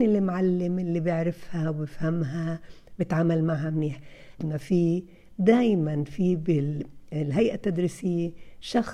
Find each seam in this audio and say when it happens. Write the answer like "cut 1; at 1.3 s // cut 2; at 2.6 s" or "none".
cut 1; at 4.4 s